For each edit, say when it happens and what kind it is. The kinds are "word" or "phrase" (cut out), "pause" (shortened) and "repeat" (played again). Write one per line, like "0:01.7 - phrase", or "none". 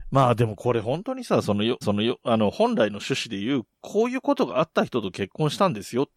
0:01.8 - repeat